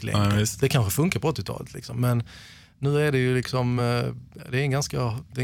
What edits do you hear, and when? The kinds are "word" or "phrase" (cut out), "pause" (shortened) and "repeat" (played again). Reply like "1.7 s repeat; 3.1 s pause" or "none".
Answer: none